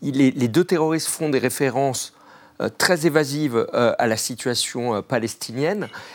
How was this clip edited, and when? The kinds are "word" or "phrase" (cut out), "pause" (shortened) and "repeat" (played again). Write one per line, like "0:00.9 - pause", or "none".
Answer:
none